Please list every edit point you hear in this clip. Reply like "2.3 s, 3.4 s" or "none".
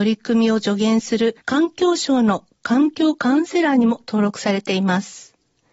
1.4 s